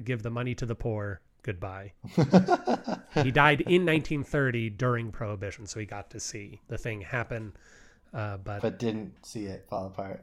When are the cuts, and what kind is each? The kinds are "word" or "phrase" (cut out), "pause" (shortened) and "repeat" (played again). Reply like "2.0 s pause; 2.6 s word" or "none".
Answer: none